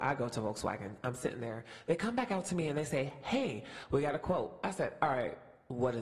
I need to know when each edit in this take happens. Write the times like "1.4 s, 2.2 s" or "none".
none